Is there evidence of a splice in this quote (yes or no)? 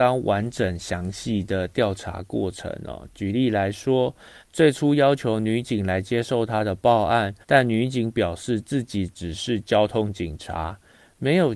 yes